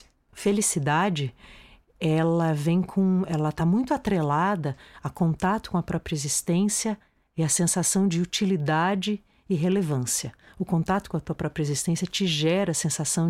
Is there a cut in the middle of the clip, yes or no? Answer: no